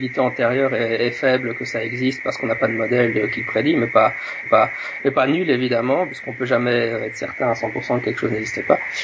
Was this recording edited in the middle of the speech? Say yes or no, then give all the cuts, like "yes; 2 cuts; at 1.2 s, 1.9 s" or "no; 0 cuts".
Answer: yes; 1 cut; at 4.5 s